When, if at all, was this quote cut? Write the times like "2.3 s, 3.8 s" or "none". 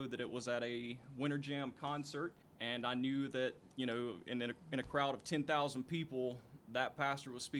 2.4 s